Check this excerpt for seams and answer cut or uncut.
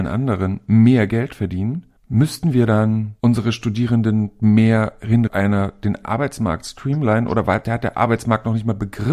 cut